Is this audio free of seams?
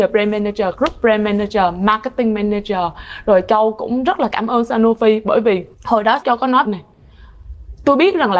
no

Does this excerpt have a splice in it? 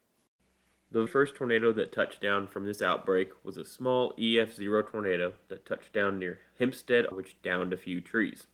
yes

